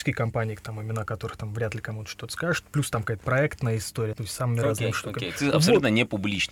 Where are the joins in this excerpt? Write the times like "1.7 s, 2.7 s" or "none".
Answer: 4.1 s, 5.4 s